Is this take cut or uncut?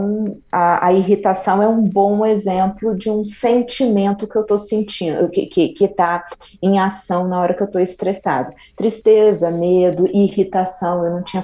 uncut